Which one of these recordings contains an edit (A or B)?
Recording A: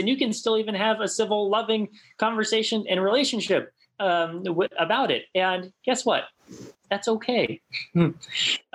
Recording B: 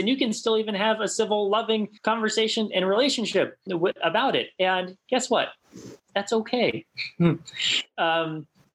B